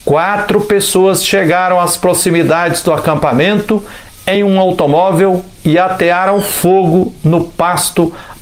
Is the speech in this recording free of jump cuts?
yes; 0 cuts

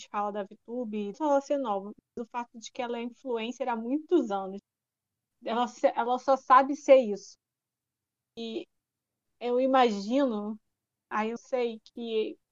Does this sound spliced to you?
yes; 2 cuts; at 1.1 s, 11.4 s

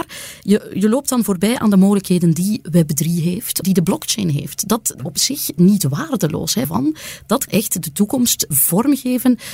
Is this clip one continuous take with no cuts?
no; 6 cuts; at 3.6 s, 5.0 s, 5.6 s, 6.6 s, 7.5 s, 8.5 s

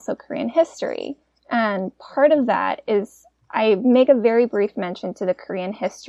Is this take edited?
no; 0 cuts

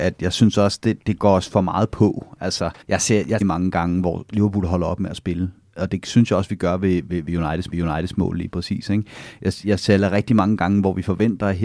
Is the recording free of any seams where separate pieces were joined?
no; 3 cuts; at 2.8 s, 3.4 s, 7.7 s

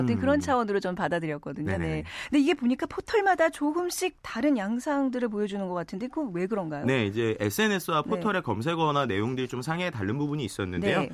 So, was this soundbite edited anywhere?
no; 0 cuts

